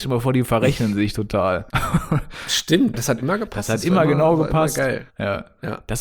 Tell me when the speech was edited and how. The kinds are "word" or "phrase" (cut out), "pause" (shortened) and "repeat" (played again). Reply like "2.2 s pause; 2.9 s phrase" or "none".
1.7 s pause; 2.9 s word; 5.1 s pause